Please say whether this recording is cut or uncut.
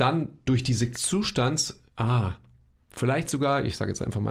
cut